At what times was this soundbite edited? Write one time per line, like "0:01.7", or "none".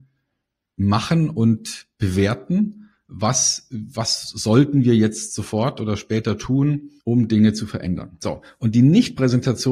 0:07.0